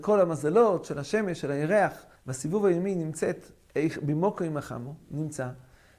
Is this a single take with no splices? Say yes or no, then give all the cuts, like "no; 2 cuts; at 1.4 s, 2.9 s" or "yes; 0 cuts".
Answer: no; 1 cut; at 2.2 s